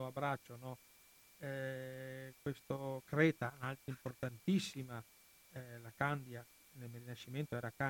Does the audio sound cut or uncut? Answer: uncut